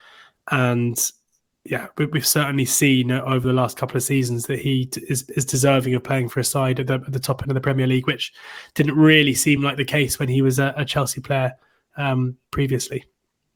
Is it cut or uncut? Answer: uncut